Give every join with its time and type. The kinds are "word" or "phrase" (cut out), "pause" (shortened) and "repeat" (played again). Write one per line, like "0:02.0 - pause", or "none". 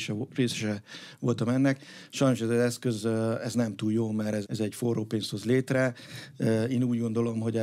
0:04.4 - word